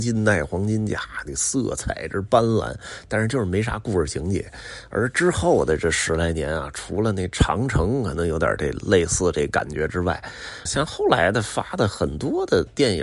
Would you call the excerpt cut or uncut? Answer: cut